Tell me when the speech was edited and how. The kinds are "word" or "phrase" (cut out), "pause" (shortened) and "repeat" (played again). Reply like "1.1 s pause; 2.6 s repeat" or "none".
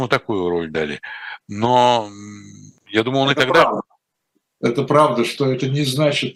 2.8 s pause